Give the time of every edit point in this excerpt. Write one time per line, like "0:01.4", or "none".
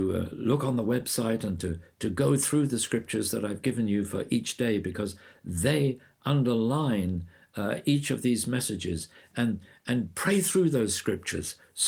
none